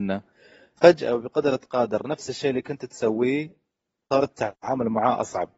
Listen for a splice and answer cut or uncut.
uncut